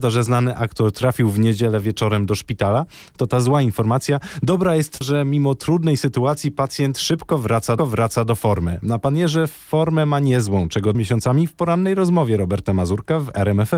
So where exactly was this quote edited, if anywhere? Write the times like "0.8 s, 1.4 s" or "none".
5.0 s, 7.8 s, 10.9 s